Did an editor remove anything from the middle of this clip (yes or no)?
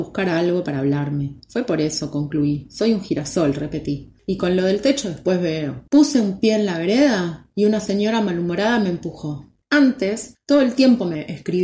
yes